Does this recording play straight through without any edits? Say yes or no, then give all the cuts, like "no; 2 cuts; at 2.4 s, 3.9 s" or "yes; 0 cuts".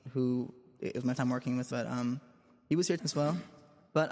no; 3 cuts; at 1.2 s, 1.7 s, 3.0 s